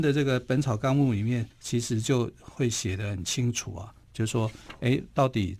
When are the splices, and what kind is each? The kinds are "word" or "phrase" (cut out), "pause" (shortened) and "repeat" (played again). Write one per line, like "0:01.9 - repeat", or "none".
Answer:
0:01.5 - pause